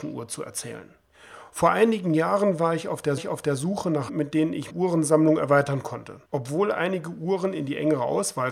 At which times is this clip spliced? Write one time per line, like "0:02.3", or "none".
0:03.2
0:04.1
0:04.7
0:06.3